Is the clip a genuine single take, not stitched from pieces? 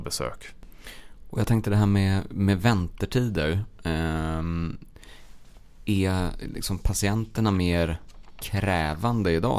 yes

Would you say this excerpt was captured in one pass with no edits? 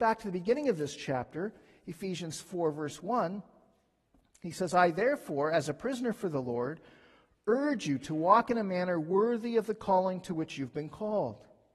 yes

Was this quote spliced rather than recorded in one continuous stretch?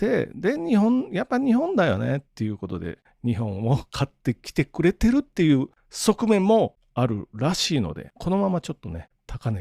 yes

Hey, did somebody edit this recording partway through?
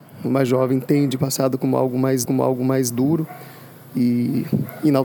yes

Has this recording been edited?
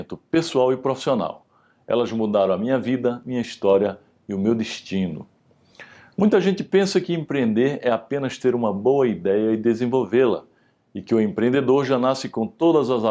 no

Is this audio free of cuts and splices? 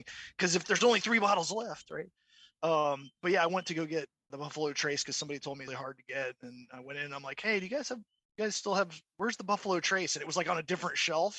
no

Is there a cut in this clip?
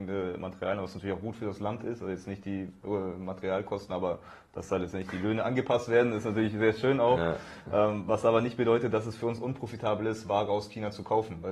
no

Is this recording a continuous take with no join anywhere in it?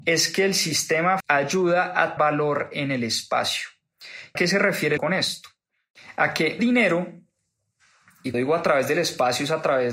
no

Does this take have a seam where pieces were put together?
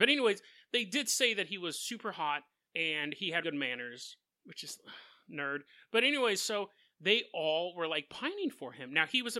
yes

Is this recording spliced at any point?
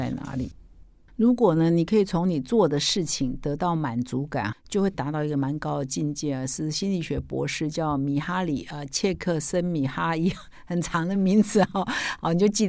yes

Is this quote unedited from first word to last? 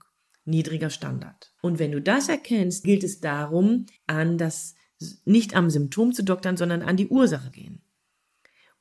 no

